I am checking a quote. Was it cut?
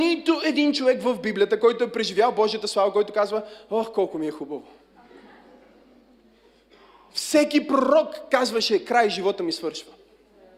no; 0 cuts

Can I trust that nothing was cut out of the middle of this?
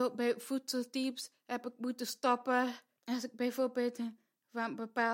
yes; 0 cuts

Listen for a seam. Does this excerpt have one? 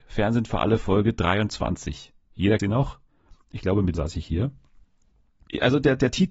yes; 2 cuts; at 2.6 s, 3.9 s

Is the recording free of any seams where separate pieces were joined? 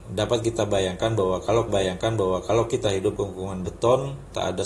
no; 2 cuts; at 1.7 s, 3.2 s

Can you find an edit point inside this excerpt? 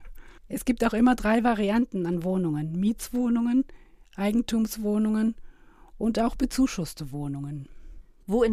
no; 0 cuts

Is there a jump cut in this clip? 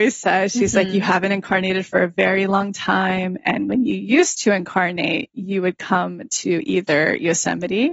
no; 0 cuts

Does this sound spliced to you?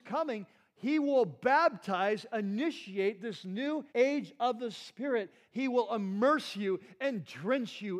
yes; 1 cut; at 3.9 s

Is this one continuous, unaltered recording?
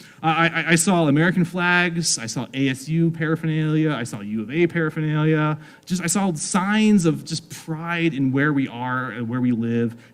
yes; 0 cuts

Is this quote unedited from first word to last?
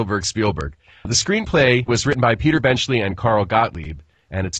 yes; 0 cuts

